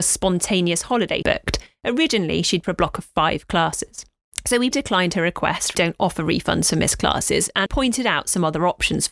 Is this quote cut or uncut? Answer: cut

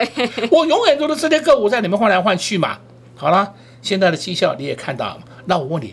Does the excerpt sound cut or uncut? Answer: uncut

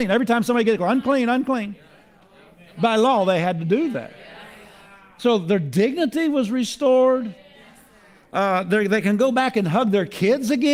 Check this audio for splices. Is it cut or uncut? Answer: uncut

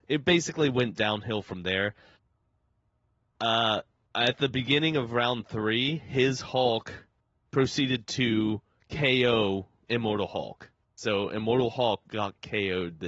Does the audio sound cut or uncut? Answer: uncut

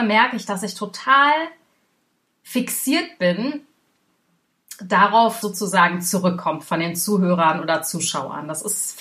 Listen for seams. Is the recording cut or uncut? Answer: cut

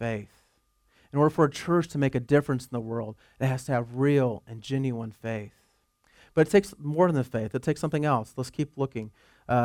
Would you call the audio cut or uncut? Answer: uncut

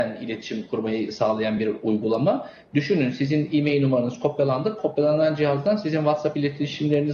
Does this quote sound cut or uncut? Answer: uncut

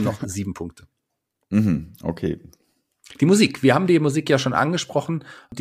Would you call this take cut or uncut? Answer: uncut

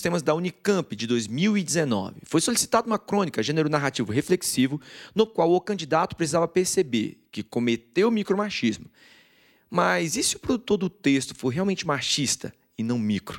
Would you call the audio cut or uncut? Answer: uncut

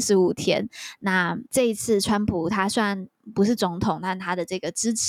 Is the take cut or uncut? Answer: cut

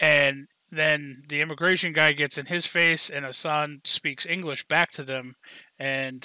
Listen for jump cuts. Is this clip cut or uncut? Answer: uncut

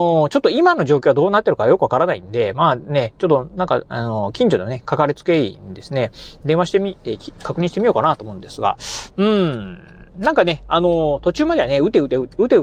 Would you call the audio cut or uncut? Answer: uncut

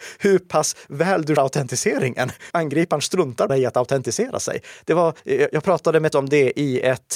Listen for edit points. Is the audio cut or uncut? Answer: cut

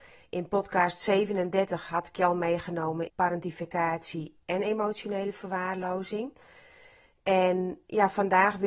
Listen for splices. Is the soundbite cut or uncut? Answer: cut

